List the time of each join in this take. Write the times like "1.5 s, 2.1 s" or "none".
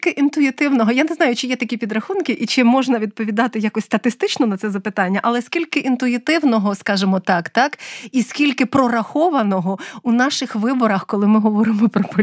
none